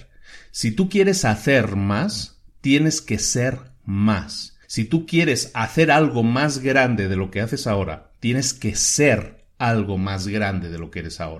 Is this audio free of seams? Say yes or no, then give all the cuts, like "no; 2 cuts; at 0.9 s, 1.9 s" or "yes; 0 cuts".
no; 1 cut; at 4.6 s